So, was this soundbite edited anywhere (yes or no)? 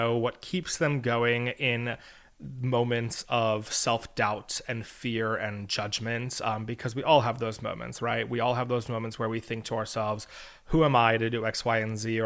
no